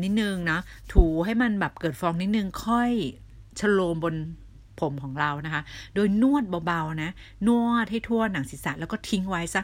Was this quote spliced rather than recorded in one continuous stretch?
yes; 1 cut; at 4.7 s

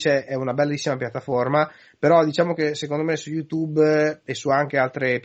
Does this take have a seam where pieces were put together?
no; 0 cuts

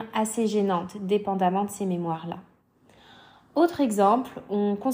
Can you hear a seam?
no; 0 cuts

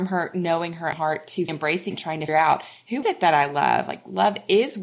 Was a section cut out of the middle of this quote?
yes; 5 cuts; at 0.9 s, 1.5 s, 1.9 s, 2.3 s, 3.0 s

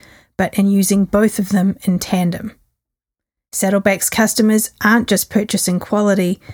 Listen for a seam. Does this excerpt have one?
no; 0 cuts

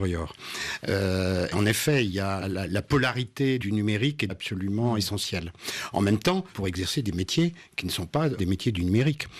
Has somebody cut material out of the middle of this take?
yes; 6 cuts; at 1.5 s, 2.4 s, 3.6 s, 4.3 s, 6.5 s, 8.4 s

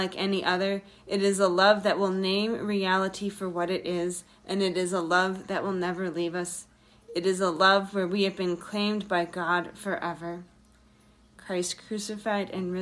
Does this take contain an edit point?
no; 0 cuts

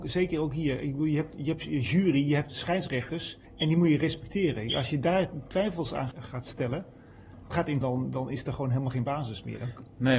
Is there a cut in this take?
yes; 4 cuts; at 3.5 s, 6.1 s, 7.5 s, 7.8 s

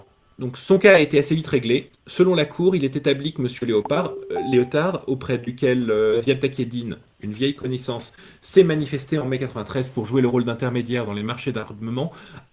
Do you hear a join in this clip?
no; 0 cuts

